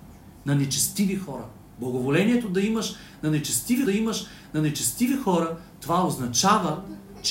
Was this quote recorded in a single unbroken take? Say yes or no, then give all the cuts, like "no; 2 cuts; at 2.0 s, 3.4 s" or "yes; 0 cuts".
no; 1 cut; at 3.8 s